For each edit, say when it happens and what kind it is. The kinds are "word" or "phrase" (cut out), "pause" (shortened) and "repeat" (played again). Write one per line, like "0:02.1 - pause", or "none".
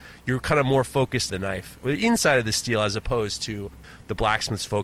0:01.3 - phrase